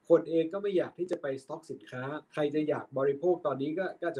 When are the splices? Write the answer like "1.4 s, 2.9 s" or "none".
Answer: 2.3 s